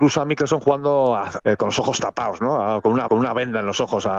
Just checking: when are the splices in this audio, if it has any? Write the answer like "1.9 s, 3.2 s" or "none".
1.4 s, 3.1 s